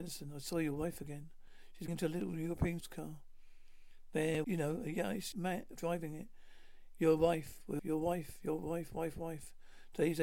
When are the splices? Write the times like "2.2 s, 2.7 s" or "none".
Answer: 1.9 s, 2.8 s, 4.4 s, 5.3 s, 5.7 s, 7.8 s